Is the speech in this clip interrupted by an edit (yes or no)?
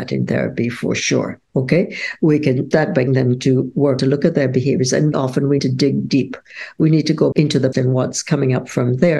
yes